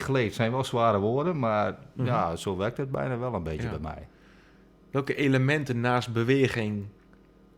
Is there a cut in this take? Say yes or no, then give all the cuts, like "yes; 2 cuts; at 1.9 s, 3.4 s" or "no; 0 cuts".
no; 0 cuts